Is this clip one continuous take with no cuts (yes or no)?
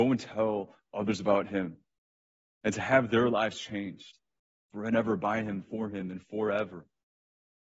yes